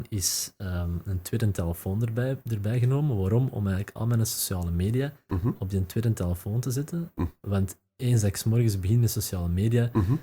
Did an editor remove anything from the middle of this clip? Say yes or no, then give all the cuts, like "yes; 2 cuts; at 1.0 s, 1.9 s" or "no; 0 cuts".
yes; 1 cut; at 7.9 s